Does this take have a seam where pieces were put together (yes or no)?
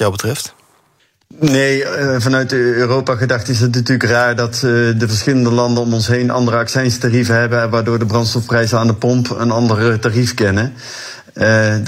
yes